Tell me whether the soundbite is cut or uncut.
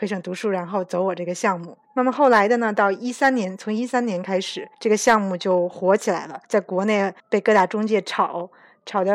cut